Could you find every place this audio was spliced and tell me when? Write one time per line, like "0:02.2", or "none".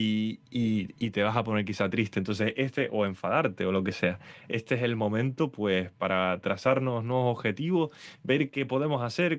none